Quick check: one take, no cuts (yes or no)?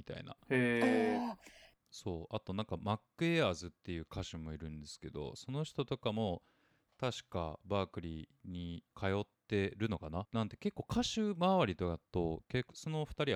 yes